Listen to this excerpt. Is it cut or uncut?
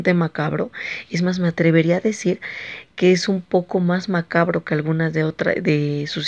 uncut